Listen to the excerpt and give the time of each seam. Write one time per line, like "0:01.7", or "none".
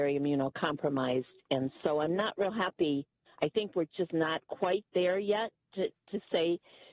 none